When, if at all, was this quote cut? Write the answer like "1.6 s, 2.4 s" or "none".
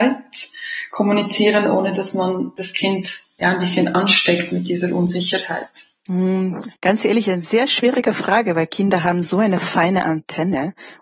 6.8 s